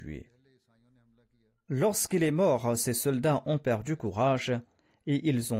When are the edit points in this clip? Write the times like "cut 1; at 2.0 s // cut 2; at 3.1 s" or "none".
none